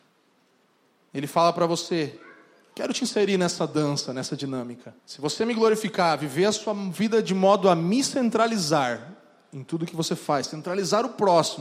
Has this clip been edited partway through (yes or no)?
yes